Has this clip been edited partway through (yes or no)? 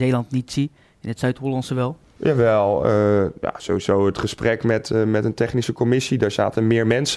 no